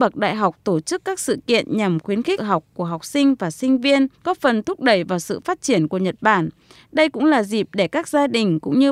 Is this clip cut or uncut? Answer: cut